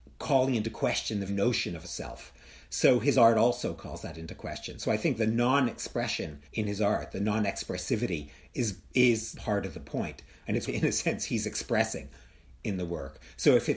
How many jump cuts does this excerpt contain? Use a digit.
5